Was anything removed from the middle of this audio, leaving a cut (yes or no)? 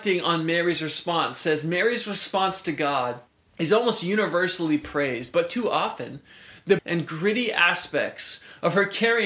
yes